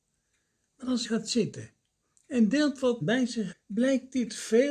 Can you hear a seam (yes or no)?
yes